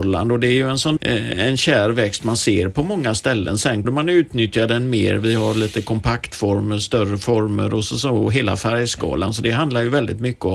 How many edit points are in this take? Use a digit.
2